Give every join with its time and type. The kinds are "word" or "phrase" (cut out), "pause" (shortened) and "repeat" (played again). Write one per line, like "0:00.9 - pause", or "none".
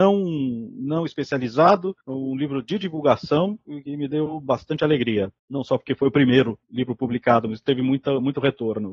0:02.0 - pause
0:05.4 - pause
0:06.6 - pause